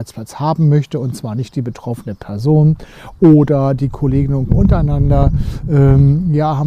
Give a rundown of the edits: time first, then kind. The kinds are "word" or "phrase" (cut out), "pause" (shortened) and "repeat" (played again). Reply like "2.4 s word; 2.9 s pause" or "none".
4.5 s word